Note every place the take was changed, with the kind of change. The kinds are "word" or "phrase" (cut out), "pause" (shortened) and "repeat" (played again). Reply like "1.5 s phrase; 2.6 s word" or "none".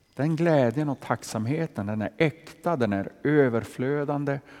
none

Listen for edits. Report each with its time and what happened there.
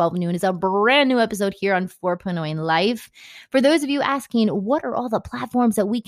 none

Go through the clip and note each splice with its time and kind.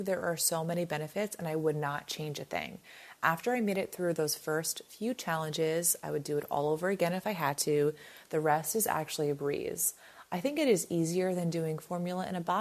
none

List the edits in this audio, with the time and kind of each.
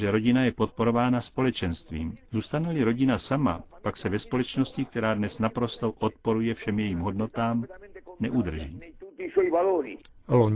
2.3 s pause

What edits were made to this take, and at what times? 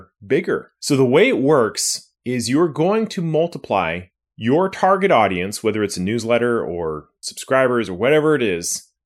none

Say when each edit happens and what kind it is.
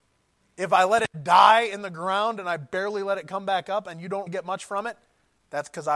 4.3 s word

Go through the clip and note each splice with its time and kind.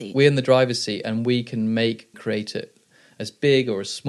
2.1 s word

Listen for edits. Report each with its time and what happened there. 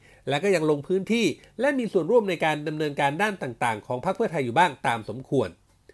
none

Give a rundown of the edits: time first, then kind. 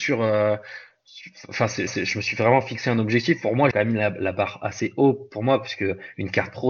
1.9 s repeat; 3.7 s word

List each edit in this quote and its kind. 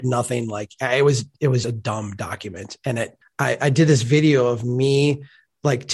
1.6 s word; 3.2 s pause

